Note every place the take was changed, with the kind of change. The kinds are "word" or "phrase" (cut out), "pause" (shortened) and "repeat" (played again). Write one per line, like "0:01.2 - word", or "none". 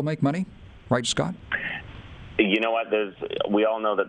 0:01.0 - word